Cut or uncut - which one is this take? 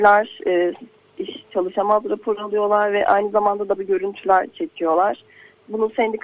cut